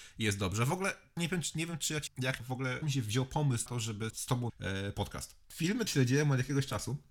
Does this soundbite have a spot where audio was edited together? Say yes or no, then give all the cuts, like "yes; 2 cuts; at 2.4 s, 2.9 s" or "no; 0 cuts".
yes; 8 cuts; at 1.2 s, 2.1 s, 2.4 s, 2.8 s, 3.7 s, 4.1 s, 4.5 s, 5.9 s